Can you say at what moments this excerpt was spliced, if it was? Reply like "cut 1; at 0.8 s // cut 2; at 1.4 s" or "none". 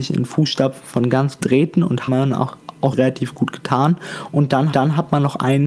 cut 1; at 1.4 s // cut 2; at 2.1 s // cut 3; at 2.9 s // cut 4; at 4.7 s